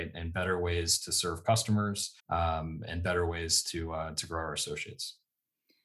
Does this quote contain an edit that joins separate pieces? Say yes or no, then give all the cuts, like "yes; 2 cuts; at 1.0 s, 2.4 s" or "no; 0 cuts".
yes; 1 cut; at 2.2 s